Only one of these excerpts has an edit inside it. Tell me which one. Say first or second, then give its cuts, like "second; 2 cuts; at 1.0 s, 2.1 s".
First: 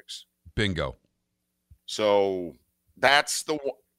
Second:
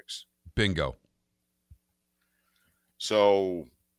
first; 1 cut; at 1.8 s